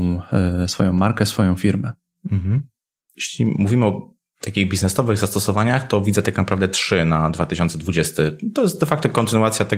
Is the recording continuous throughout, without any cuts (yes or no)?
yes